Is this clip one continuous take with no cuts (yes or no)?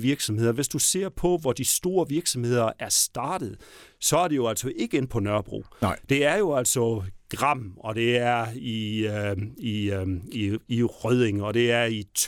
yes